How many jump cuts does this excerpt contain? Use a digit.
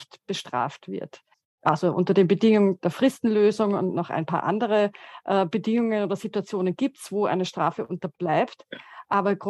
1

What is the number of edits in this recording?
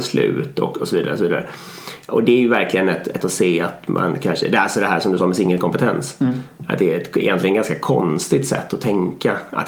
1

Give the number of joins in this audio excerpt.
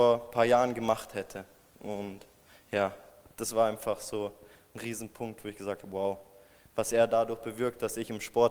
0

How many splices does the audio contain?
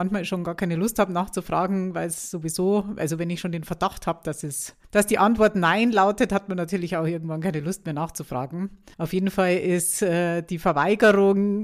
2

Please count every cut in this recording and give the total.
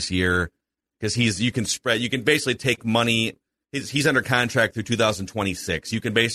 0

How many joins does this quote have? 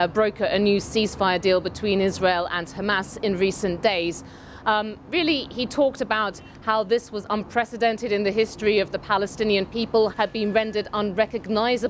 1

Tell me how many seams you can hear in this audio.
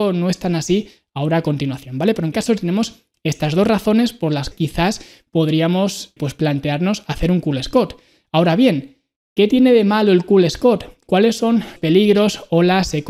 4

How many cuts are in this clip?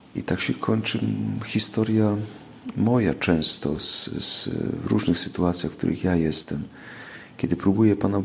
0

